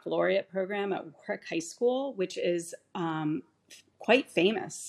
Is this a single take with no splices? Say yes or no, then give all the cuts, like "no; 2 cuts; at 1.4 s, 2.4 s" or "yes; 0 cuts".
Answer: yes; 0 cuts